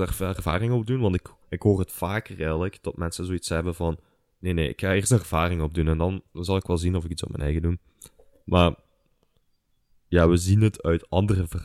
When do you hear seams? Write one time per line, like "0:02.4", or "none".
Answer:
0:01.4

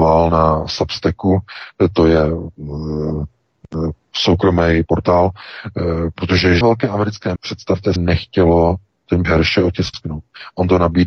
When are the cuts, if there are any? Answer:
0:04.9
0:06.6
0:07.4
0:08.0
0:09.2

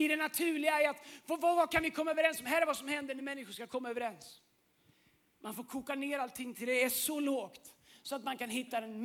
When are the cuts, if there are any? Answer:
none

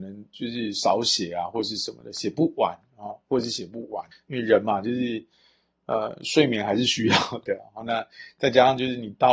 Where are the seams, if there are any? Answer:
0:04.1

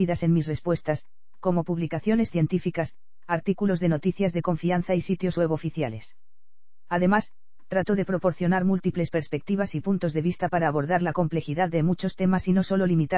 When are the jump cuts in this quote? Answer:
none

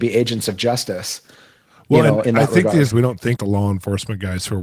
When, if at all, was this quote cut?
0:02.2
0:02.9
0:03.4

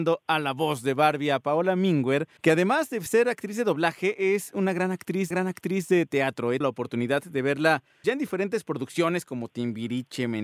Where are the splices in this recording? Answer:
0:02.4
0:05.3
0:06.6
0:08.0

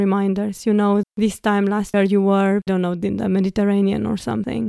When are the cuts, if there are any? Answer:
0:01.0
0:01.9
0:02.7

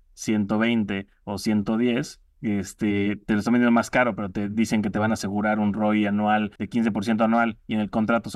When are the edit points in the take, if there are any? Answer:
0:02.3
0:06.6

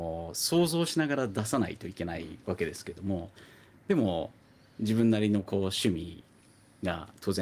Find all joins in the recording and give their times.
0:02.4

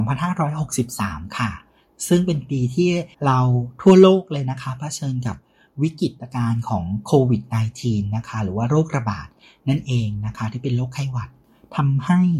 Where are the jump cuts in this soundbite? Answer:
0:03.1

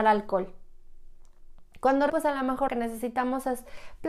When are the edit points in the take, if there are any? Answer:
0:02.1
0:02.7

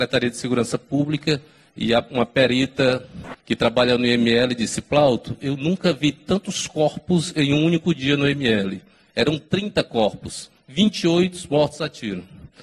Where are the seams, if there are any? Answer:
0:03.4

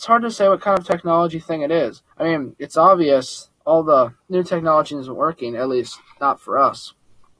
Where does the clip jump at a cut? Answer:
0:02.1
0:03.6
0:04.2

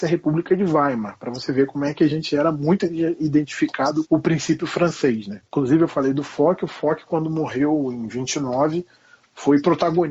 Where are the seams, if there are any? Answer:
0:04.0
0:05.5

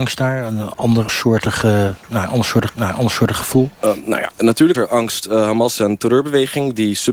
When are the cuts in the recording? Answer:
0:01.1
0:02.7
0:04.7
0:05.8

